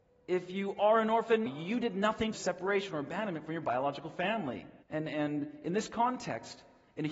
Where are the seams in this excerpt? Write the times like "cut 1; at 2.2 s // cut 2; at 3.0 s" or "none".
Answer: cut 1; at 1.5 s // cut 2; at 2.3 s // cut 3; at 4.8 s